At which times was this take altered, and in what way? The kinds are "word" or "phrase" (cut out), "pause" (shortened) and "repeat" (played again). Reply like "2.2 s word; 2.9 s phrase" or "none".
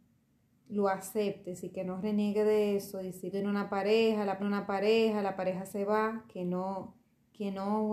3.3 s phrase; 4.4 s repeat